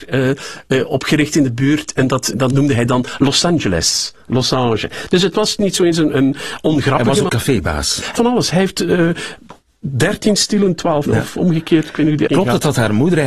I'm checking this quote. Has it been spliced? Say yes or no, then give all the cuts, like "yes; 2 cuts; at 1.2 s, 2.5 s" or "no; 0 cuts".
yes; 7 cuts; at 2.3 s, 5.6 s, 6.1 s, 7.3 s, 8.2 s, 11.1 s, 12.3 s